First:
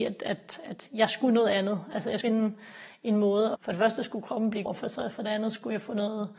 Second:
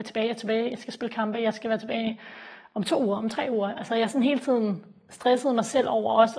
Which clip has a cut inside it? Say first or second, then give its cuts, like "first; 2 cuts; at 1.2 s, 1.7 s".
first; 3 cuts; at 2.2 s, 3.6 s, 4.7 s